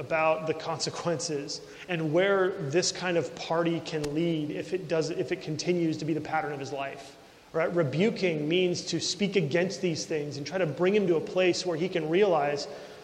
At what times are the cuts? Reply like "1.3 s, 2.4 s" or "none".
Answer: 7.3 s